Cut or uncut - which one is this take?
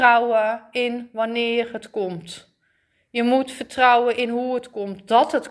uncut